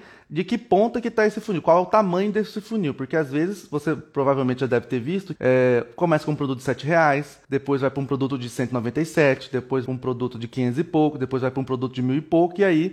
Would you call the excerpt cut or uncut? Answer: cut